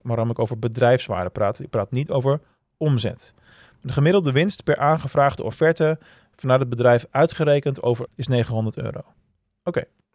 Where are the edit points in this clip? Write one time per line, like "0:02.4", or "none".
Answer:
0:08.1